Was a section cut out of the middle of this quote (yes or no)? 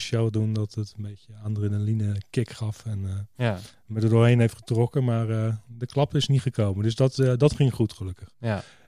no